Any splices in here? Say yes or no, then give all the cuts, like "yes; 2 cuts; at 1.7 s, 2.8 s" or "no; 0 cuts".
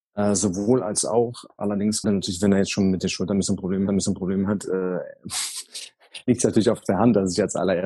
yes; 2 cuts; at 2.0 s, 3.9 s